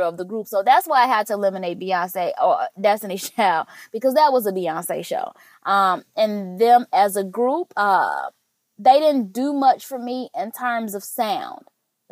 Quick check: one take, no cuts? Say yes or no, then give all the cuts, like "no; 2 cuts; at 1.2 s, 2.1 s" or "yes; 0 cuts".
yes; 0 cuts